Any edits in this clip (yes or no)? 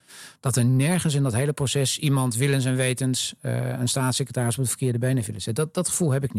no